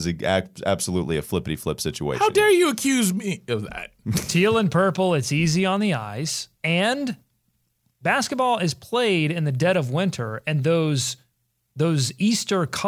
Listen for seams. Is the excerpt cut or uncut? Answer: uncut